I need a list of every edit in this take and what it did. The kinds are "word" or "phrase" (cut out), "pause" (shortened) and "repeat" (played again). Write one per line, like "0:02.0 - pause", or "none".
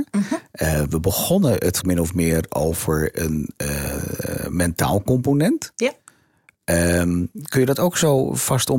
0:01.8 - word